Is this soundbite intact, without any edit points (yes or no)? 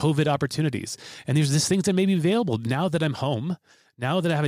yes